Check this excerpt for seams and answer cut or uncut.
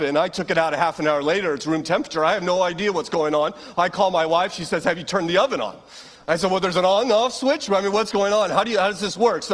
uncut